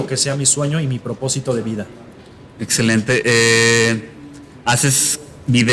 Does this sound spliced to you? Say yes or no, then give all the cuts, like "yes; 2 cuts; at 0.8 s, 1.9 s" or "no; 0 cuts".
no; 0 cuts